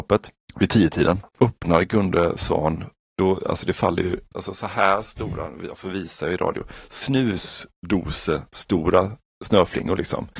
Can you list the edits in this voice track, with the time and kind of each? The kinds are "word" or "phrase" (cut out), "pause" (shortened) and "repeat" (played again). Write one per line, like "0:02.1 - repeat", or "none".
0:01.3 - pause
0:04.3 - word